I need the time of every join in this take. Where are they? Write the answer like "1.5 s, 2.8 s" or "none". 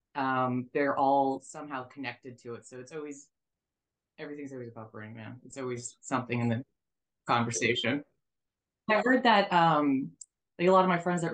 none